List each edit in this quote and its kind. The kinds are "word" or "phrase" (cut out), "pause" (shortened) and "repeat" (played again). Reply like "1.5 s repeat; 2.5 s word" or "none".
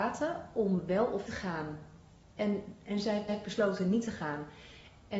1.3 s word; 3.3 s repeat